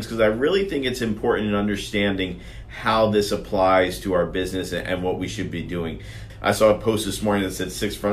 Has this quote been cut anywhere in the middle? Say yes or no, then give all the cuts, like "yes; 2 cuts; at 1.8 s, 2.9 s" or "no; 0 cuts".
no; 0 cuts